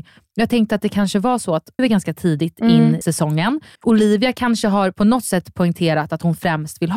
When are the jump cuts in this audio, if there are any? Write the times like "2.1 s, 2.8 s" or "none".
1.8 s, 3.0 s, 3.8 s